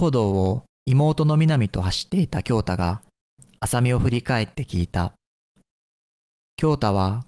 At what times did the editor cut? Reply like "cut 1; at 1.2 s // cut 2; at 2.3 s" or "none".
none